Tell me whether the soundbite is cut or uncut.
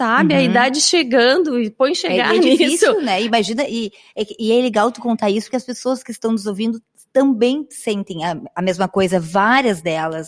uncut